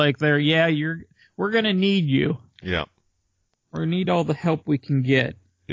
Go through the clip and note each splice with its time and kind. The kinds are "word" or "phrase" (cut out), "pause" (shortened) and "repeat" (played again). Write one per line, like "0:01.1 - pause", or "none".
none